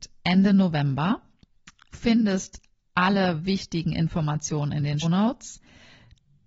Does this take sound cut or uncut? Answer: cut